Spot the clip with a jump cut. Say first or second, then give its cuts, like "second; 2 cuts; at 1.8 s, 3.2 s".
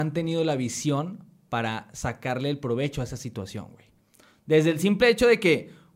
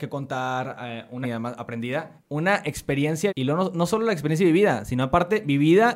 second; 3 cuts; at 1.2 s, 2.2 s, 3.3 s